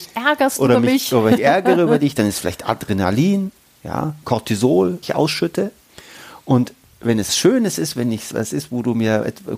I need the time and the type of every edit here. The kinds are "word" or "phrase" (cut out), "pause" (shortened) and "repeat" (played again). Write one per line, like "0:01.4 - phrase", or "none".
0:01.4 - word
0:05.0 - word
0:07.3 - word
0:08.3 - word